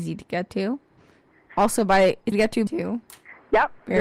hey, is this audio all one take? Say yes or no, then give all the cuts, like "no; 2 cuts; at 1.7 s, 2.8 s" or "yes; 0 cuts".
no; 2 cuts; at 2.3 s, 2.7 s